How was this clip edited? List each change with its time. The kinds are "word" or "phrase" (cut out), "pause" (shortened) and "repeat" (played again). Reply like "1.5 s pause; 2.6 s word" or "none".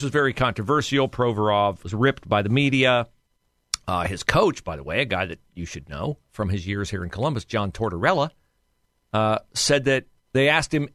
1.8 s word; 6.2 s pause